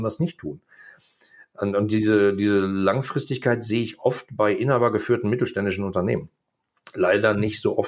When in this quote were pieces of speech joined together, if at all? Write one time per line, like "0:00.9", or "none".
none